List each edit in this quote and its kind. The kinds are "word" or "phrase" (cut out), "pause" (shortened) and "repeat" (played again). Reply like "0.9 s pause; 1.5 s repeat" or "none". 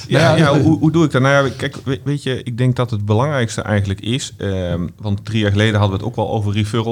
none